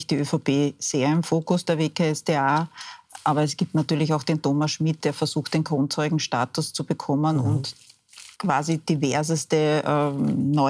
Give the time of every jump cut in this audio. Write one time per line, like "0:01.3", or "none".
0:08.3